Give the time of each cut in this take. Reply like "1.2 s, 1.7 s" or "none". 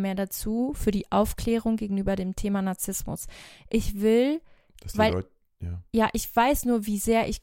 none